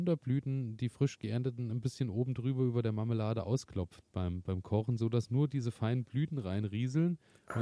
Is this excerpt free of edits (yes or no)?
yes